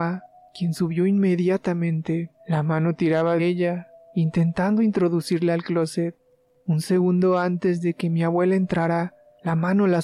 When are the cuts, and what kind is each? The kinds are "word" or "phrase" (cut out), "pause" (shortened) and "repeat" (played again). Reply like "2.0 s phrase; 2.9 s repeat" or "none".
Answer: 2.4 s pause; 3.4 s word